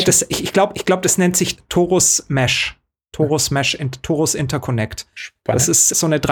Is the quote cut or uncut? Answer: uncut